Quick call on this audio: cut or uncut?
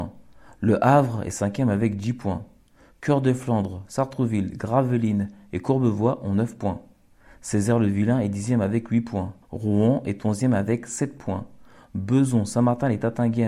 cut